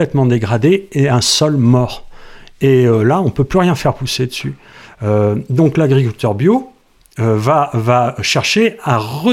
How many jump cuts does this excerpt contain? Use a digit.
0